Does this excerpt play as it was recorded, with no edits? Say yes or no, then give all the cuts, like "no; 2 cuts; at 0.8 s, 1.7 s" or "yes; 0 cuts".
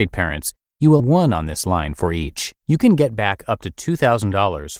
no; 2 cuts; at 1.0 s, 2.6 s